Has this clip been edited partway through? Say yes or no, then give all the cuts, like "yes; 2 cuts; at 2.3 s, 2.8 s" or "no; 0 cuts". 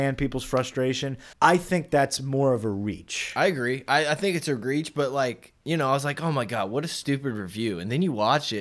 yes; 1 cut; at 1.3 s